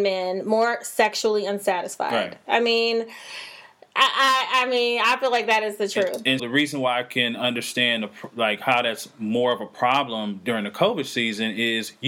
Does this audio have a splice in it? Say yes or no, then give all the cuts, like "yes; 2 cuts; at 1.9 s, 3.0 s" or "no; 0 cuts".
yes; 1 cut; at 6.4 s